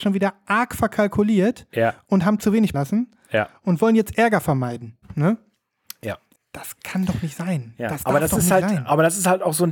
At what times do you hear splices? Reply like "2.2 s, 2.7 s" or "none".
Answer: 2.7 s, 5.0 s, 6.4 s